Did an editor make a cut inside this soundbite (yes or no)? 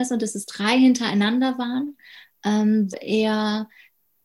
yes